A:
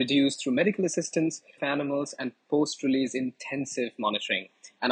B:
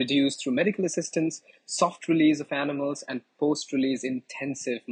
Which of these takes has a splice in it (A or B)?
A